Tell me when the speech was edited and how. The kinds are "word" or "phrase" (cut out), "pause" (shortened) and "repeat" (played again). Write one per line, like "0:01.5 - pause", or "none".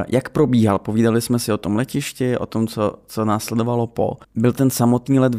0:04.2 - pause